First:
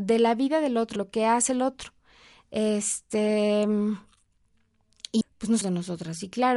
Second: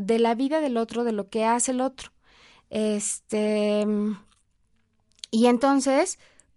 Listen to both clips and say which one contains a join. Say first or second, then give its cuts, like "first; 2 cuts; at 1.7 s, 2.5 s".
first; 3 cuts; at 1.0 s, 5.2 s, 5.6 s